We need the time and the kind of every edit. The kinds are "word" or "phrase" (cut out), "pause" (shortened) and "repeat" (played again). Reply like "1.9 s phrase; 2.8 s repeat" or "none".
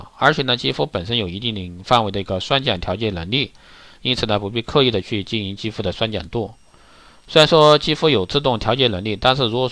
none